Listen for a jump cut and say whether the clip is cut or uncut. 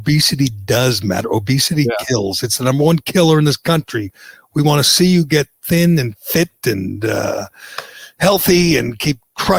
uncut